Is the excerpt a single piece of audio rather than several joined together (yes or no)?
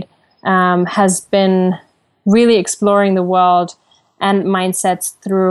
yes